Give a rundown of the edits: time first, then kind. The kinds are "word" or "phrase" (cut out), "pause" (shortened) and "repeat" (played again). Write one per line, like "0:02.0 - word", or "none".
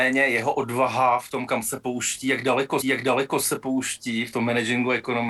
0:02.8 - repeat